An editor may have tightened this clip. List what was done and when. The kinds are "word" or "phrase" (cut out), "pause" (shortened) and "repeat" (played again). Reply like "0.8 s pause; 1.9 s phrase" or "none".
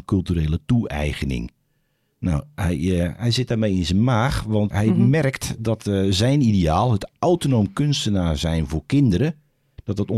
4.7 s word

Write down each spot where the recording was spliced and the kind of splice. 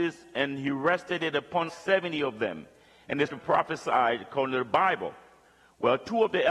1.7 s word; 3.3 s word

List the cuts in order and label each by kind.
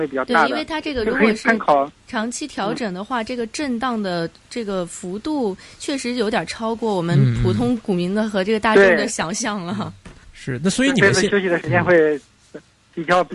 2.0 s pause; 10.2 s pause

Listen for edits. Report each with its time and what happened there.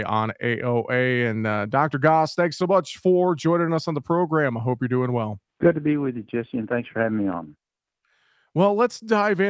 5.5 s pause

